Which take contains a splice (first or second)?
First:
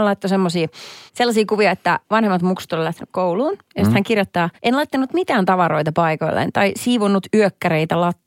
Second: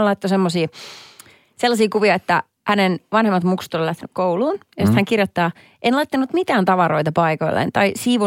first